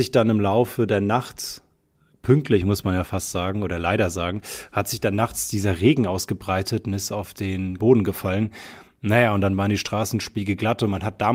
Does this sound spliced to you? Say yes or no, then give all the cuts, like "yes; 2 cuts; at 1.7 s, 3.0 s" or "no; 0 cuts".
yes; 1 cut; at 7.8 s